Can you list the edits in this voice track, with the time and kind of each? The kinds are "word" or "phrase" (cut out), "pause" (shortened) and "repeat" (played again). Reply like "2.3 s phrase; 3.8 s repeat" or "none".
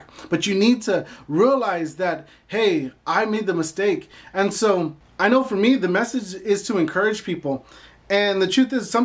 none

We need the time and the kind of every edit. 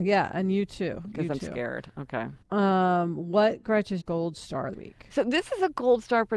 2.4 s pause; 4.0 s word; 4.7 s word

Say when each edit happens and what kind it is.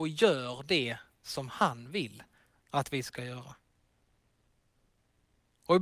none

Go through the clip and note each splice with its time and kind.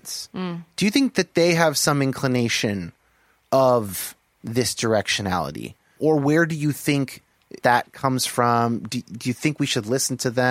7.6 s word

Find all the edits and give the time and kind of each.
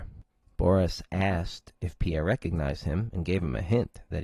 none

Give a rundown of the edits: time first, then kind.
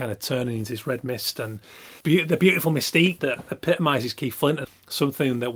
2.0 s pause; 3.2 s word

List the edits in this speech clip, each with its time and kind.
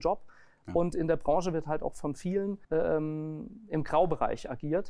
2.6 s pause

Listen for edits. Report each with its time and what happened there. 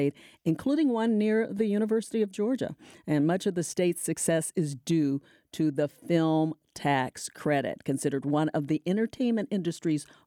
none

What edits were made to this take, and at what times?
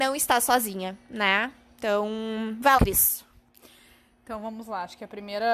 2.8 s phrase

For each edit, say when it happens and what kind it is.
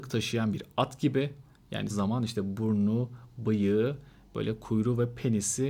1.9 s phrase

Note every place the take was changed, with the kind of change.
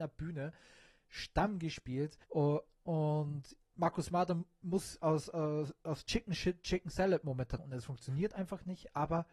2.2 s pause; 7.6 s word

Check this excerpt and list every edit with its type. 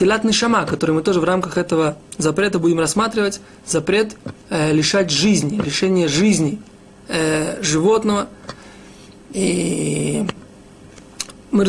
none

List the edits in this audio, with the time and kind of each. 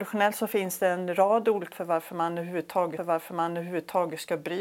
1.7 s word; 3.0 s repeat

